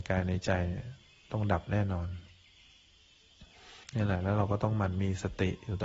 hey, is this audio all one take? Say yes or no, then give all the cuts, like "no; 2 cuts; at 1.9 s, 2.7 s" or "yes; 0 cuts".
no; 1 cut; at 3.8 s